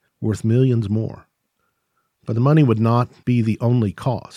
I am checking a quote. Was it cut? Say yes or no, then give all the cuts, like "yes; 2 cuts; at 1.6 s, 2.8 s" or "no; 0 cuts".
no; 0 cuts